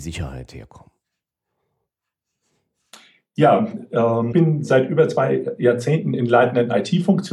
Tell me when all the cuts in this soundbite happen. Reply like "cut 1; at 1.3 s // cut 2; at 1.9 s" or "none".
cut 1; at 4.3 s